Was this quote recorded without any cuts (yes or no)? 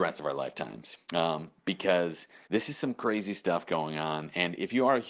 no